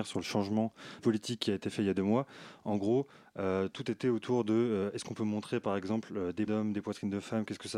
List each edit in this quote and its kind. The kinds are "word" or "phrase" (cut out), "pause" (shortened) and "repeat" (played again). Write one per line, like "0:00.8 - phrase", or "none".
0:01.0 - word
0:06.5 - word